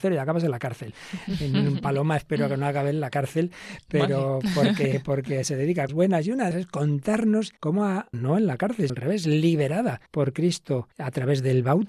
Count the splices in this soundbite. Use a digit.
7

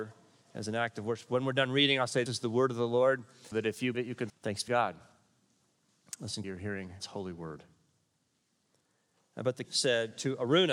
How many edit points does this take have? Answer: 8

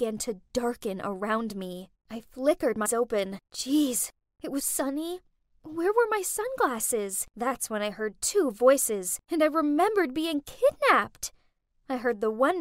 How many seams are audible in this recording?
6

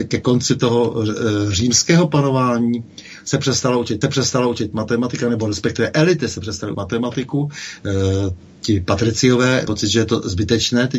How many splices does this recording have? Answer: 3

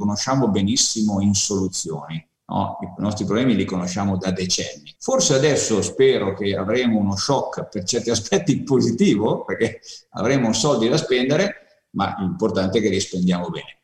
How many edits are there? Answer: 2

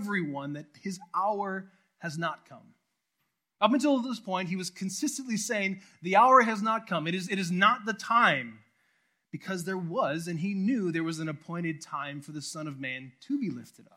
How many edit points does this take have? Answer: 0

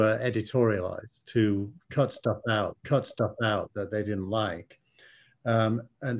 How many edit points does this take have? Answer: 1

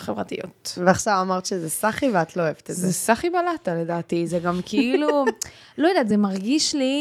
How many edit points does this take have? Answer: 0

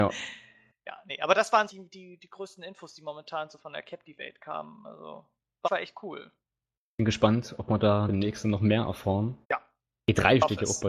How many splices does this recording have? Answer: 5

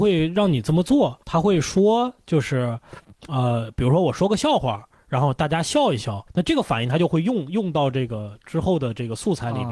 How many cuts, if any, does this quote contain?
2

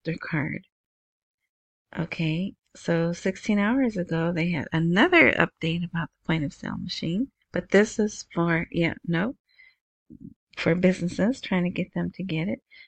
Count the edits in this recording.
1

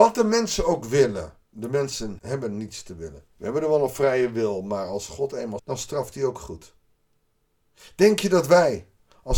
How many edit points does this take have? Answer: 4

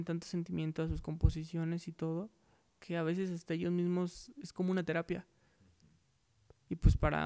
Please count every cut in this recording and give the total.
0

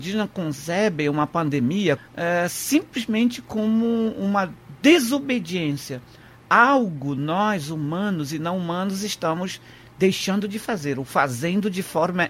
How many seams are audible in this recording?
1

